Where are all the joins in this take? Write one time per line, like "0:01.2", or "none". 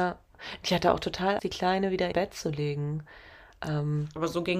0:01.4
0:02.1